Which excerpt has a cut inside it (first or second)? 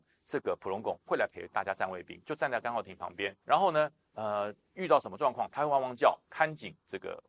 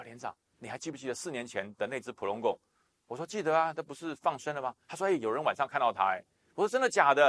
first